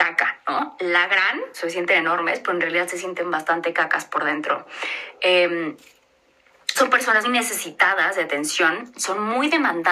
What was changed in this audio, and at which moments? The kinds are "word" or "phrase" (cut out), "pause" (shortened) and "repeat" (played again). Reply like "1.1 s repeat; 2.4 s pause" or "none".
1.5 s word; 6.7 s word; 7.2 s word